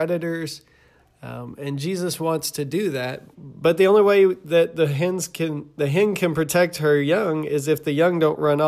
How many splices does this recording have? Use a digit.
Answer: 1